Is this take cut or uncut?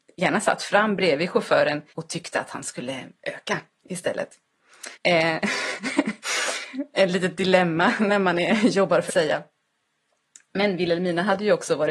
cut